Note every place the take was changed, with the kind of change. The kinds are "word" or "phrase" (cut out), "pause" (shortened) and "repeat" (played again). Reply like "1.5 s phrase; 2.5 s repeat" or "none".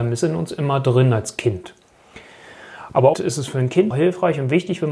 3.1 s word; 3.9 s word

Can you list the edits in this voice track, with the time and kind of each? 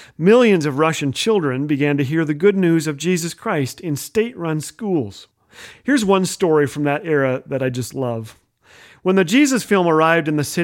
none

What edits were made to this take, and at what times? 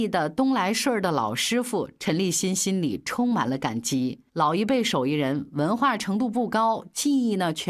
4.3 s pause

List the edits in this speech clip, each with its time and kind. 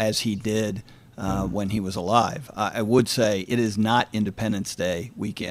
none

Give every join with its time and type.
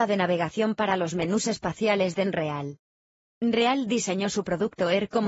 none

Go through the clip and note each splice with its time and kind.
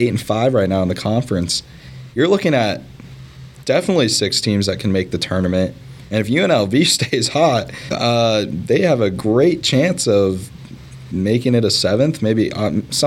7.9 s word

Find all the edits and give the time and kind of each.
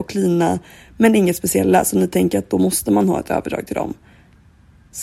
none

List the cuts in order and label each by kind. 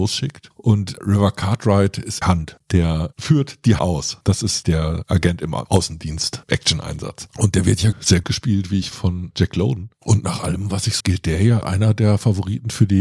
2.2 s word; 3.8 s word; 4.6 s word; 6.5 s word; 7.9 s word; 8.2 s word; 8.9 s word; 11.0 s word; 11.6 s word

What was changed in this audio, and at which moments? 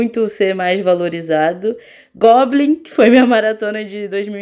none

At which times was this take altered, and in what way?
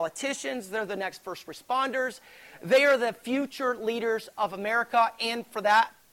none

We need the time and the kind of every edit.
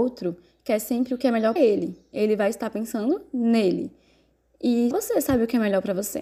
1.6 s word; 4.9 s word

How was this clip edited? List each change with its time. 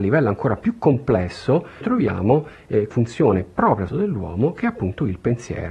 1.8 s word; 2.9 s word; 3.9 s word

